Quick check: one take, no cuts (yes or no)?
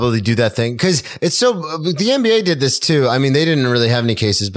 yes